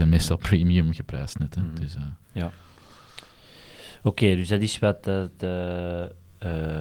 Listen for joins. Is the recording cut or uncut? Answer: cut